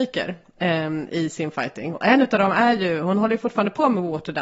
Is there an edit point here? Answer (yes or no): no